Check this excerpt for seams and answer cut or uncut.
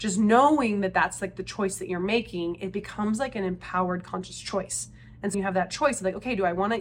cut